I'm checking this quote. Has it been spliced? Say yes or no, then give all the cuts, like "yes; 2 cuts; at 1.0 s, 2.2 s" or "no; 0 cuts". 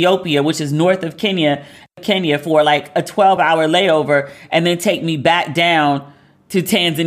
no; 0 cuts